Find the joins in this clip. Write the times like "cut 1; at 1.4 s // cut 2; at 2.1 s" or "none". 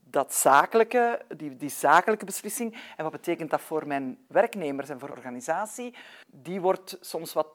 cut 1; at 5.1 s // cut 2; at 6.2 s